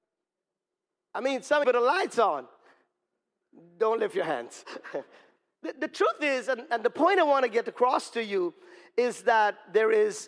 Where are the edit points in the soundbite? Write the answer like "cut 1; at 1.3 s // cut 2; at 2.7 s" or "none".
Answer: cut 1; at 1.6 s // cut 2; at 5.4 s